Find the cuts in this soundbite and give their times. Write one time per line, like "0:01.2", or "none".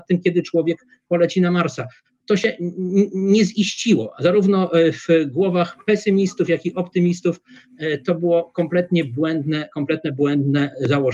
none